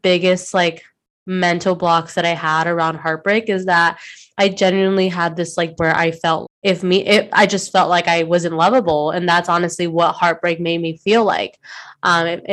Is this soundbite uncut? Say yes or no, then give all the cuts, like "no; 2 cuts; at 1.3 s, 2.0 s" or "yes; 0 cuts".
no; 2 cuts; at 5.8 s, 6.4 s